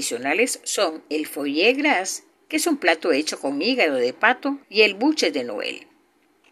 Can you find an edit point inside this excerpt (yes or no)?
yes